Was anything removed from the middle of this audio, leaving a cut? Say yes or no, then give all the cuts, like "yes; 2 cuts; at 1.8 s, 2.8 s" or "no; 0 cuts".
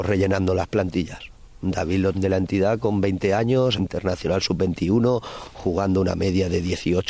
yes; 2 cuts; at 2.1 s, 3.8 s